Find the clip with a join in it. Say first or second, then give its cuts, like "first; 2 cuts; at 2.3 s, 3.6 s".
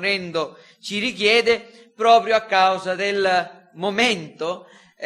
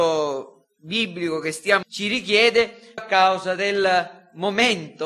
second; 2 cuts; at 1.8 s, 3.0 s